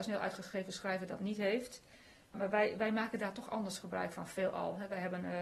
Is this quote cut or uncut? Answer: uncut